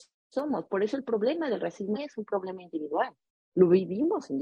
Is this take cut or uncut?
cut